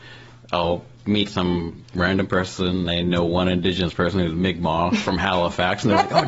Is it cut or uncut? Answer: uncut